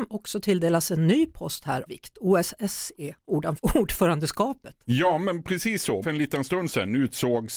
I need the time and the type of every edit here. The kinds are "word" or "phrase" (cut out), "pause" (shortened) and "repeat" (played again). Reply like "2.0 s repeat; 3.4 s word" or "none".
1.9 s word; 3.6 s word; 6.0 s word